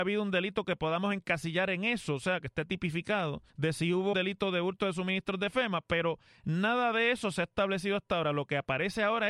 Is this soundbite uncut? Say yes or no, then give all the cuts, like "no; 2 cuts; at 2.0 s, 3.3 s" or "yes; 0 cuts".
no; 2 cuts; at 3.5 s, 4.1 s